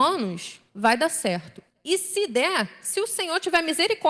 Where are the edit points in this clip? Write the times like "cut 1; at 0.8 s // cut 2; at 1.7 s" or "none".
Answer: none

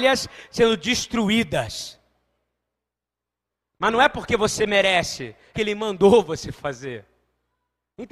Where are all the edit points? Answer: cut 1; at 5.5 s

